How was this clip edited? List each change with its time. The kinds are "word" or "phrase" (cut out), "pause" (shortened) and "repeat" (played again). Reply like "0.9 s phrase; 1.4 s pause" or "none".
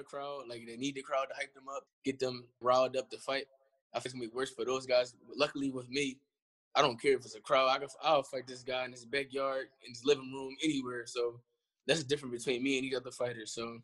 1.9 s word; 2.6 s word; 4.1 s word